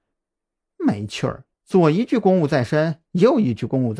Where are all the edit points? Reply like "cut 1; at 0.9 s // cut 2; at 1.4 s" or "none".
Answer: cut 1; at 1.5 s